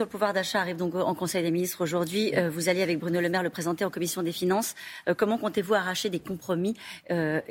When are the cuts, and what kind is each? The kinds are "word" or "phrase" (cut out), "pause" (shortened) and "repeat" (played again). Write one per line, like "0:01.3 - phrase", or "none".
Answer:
none